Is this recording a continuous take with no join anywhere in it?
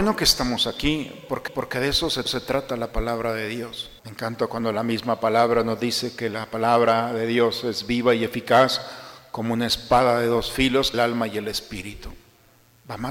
no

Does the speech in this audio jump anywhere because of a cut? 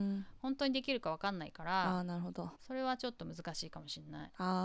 yes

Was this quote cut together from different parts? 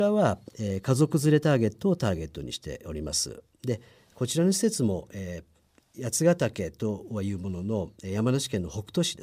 no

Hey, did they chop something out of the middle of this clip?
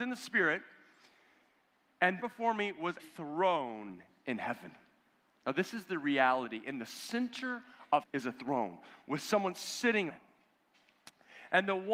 yes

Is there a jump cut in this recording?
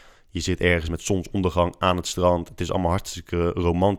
no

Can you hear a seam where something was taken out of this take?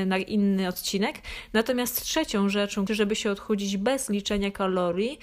yes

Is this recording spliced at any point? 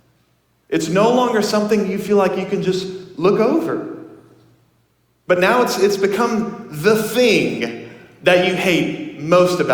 no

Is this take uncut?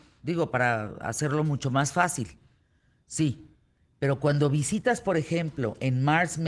yes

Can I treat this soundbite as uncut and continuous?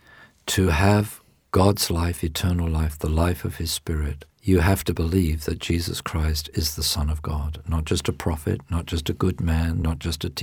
no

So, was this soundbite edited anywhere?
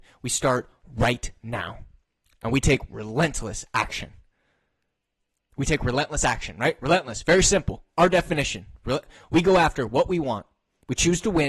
no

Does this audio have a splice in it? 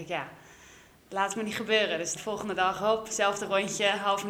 yes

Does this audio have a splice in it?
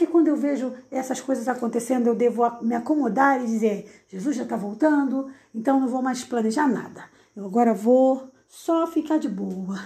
no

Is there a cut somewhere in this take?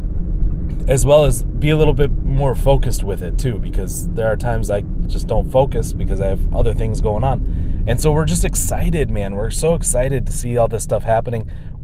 no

